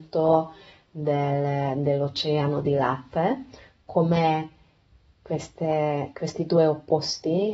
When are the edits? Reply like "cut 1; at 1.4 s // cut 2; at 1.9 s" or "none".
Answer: none